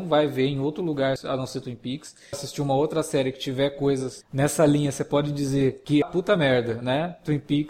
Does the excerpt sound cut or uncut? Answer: cut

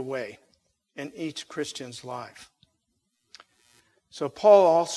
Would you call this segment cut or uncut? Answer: uncut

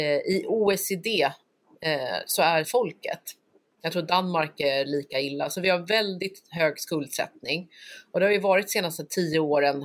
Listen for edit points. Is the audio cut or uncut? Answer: cut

